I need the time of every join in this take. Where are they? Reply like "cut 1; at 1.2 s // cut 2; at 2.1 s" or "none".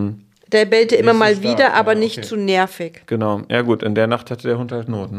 none